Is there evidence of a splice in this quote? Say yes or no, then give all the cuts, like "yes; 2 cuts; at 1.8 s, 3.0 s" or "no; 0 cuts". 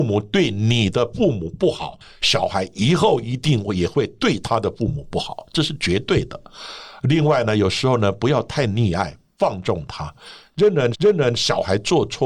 yes; 1 cut; at 10.9 s